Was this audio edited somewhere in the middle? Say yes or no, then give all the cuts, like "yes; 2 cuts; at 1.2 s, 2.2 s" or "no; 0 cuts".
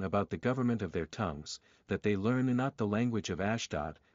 no; 0 cuts